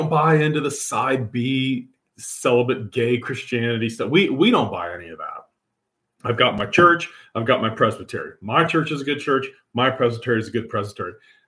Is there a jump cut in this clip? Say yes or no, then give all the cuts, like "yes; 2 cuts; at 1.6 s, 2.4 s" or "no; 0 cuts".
no; 0 cuts